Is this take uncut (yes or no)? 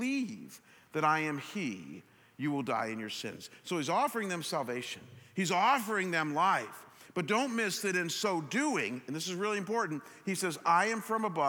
yes